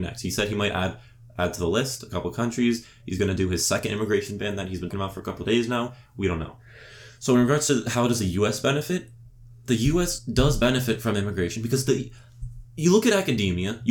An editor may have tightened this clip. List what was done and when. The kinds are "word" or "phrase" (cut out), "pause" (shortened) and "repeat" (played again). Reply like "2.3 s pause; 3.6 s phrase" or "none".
4.9 s word